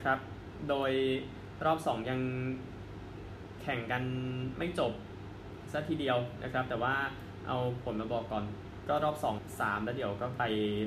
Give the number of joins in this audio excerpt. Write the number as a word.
one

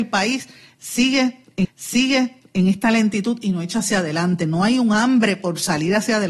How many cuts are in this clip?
one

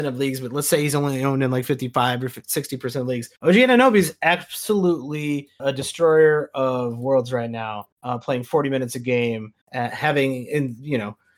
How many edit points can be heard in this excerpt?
four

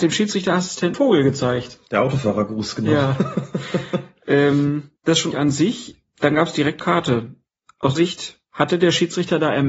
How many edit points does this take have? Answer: six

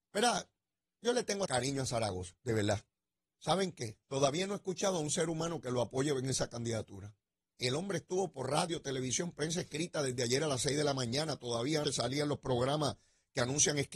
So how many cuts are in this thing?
six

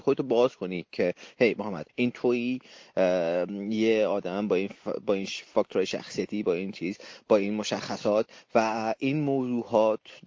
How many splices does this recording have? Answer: one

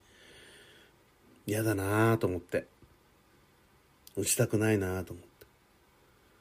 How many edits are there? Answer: zero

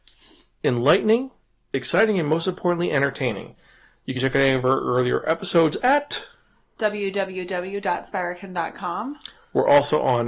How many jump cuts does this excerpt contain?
zero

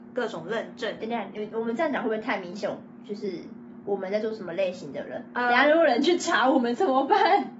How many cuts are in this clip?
zero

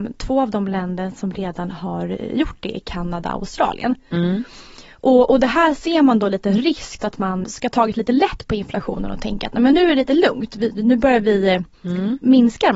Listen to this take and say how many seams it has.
three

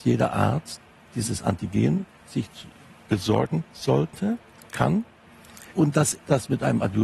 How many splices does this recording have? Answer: two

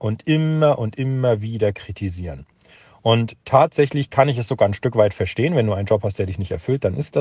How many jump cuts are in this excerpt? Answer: one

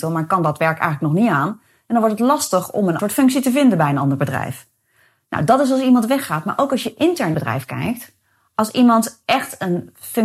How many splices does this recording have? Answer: two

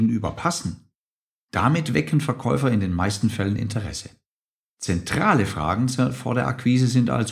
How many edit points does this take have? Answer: zero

